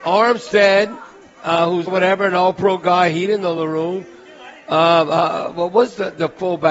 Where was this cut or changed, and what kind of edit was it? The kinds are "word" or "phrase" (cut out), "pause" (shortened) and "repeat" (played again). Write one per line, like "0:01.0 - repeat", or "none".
0:01.9 - phrase